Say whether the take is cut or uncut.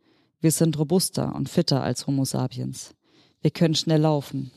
uncut